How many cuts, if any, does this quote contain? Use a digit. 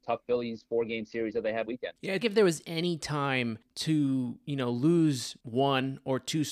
2